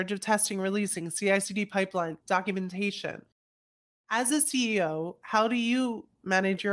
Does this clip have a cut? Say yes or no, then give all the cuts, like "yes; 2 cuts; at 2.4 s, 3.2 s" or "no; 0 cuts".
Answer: yes; 1 cut; at 2.2 s